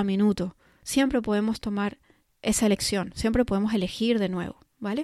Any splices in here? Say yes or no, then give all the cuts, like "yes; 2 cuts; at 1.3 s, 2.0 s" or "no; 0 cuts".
no; 0 cuts